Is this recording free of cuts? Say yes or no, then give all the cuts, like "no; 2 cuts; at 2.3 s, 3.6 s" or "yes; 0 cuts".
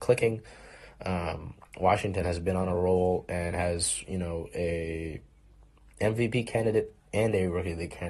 yes; 0 cuts